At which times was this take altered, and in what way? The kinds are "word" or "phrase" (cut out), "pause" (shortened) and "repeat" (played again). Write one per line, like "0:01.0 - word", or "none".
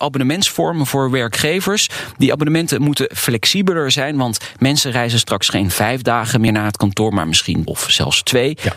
0:07.7 - word